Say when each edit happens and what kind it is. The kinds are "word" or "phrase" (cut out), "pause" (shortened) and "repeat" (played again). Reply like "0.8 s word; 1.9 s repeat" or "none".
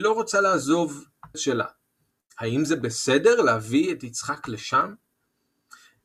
1.3 s phrase